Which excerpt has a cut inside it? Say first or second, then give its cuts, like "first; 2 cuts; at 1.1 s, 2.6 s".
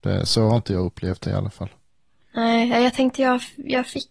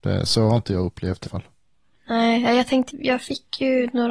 second; 2 cuts; at 1.3 s, 2.9 s